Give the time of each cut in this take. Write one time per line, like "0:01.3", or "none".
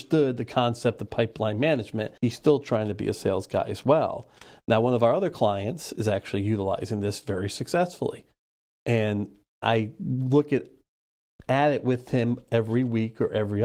0:02.2